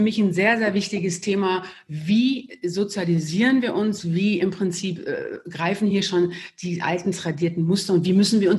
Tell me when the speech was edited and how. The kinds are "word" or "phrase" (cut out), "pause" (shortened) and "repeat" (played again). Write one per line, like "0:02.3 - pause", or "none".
none